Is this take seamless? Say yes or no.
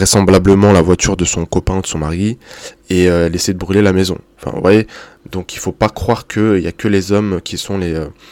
yes